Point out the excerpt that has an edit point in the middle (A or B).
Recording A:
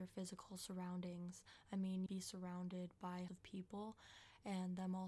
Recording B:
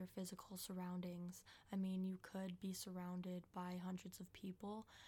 A